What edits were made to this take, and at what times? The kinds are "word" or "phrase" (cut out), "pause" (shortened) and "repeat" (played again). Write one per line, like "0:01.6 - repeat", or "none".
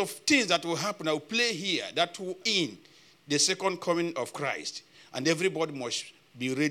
0:02.4 - word